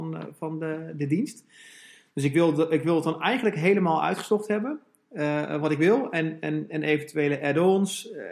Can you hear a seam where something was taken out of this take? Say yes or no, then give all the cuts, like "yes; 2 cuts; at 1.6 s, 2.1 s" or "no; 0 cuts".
no; 0 cuts